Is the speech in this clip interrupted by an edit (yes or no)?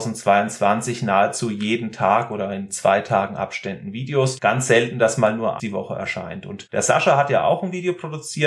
yes